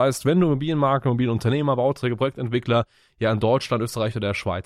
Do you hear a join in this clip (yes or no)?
no